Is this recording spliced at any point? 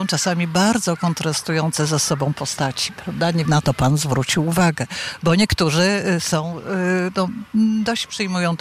yes; 1 cut; at 3.4 s

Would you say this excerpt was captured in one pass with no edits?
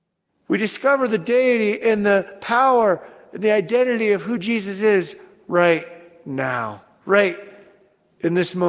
yes; 0 cuts

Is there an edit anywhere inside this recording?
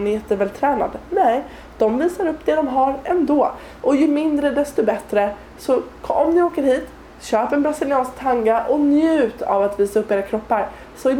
yes; 1 cut; at 7.1 s

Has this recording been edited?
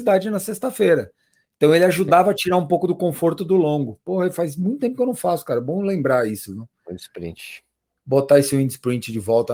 no; 0 cuts

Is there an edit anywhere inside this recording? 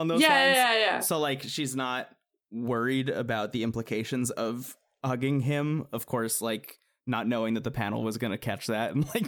no; 0 cuts

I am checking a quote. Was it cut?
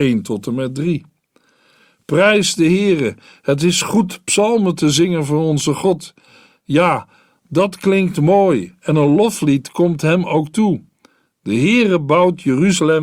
no; 0 cuts

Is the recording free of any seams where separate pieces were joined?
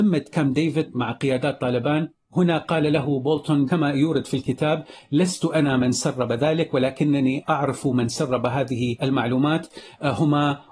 yes; 0 cuts

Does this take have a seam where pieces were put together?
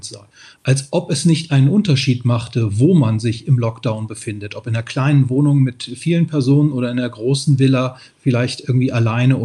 no; 0 cuts

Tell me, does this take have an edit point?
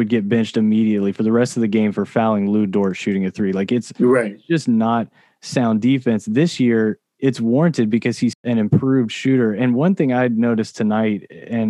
no; 0 cuts

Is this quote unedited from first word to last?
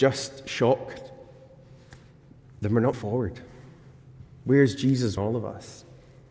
no; 2 cuts; at 2.9 s, 5.2 s

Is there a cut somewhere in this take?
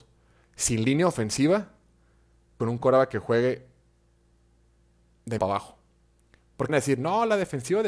yes; 3 cuts; at 2.6 s, 5.4 s, 6.7 s

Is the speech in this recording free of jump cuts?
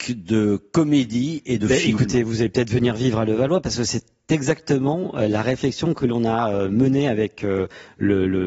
yes; 0 cuts

